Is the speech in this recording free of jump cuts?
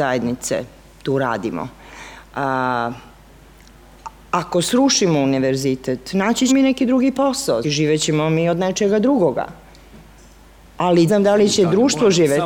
no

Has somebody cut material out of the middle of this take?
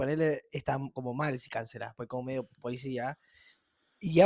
no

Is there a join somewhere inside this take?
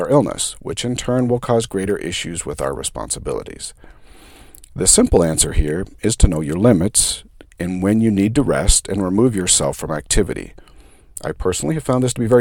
no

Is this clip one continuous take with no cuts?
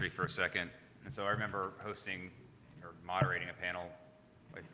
yes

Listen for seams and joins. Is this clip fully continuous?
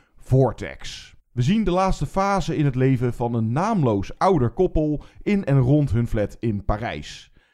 no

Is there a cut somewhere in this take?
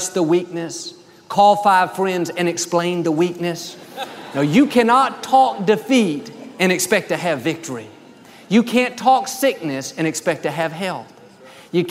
no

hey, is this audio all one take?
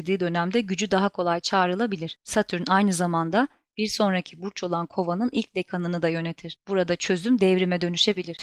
yes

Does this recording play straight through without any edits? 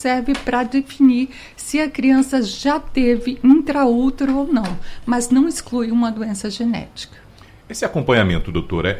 yes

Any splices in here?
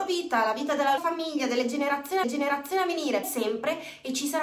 yes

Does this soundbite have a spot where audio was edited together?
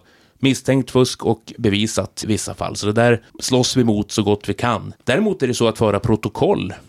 yes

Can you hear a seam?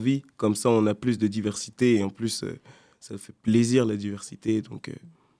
no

